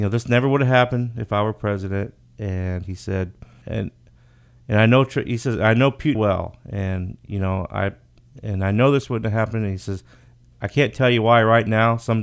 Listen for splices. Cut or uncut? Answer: cut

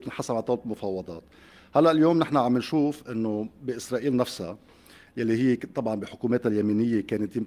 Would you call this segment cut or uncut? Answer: uncut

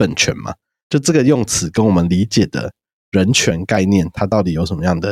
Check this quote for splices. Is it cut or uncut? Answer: uncut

